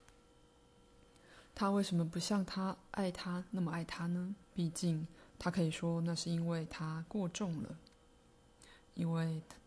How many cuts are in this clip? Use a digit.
2